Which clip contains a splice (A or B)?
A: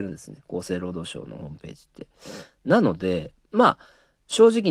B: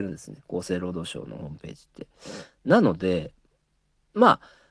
A